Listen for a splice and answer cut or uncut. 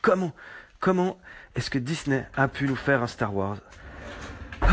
uncut